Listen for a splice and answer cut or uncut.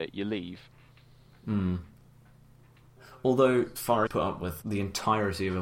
cut